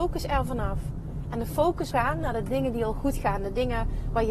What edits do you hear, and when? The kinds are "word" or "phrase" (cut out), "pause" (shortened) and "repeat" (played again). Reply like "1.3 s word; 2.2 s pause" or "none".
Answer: 1.9 s word